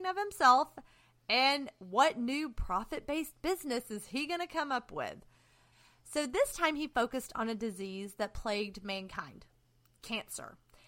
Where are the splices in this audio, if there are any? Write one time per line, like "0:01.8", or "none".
none